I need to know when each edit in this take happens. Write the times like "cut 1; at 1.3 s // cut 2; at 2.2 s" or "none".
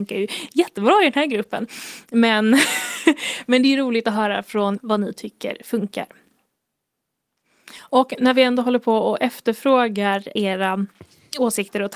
cut 1; at 4.8 s // cut 2; at 10.4 s